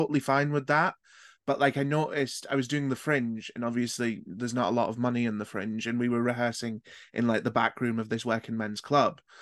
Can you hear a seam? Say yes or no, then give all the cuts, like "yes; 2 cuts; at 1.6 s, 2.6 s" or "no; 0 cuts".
no; 0 cuts